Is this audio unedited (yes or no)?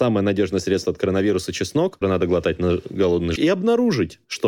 no